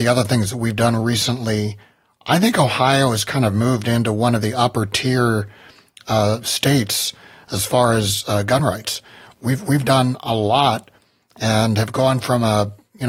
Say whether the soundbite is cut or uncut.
uncut